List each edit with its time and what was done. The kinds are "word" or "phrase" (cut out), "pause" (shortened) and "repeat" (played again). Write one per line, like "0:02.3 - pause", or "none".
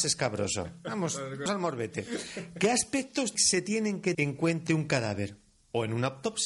0:01.5 - word
0:03.3 - word
0:04.1 - word
0:04.7 - word